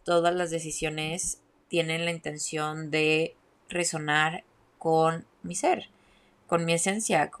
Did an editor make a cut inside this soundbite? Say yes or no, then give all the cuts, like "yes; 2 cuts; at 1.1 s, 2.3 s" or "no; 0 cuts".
no; 0 cuts